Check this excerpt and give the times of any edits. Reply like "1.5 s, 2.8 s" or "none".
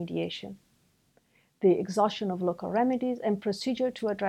none